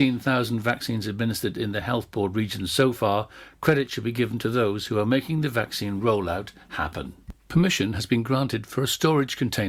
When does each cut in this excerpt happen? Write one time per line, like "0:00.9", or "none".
none

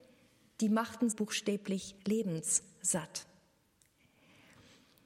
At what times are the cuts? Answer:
0:01.1
0:02.0

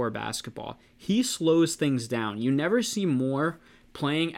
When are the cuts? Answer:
none

